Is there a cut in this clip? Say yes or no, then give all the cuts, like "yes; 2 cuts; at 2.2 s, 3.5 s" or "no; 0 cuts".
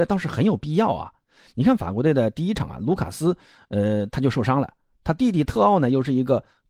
no; 0 cuts